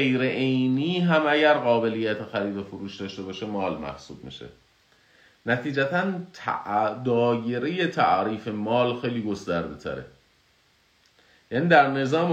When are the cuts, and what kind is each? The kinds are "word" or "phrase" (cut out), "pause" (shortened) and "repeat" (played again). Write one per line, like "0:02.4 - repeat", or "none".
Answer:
none